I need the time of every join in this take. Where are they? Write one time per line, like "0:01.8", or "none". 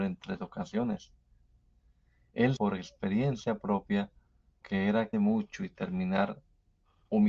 0:02.6
0:04.6
0:05.1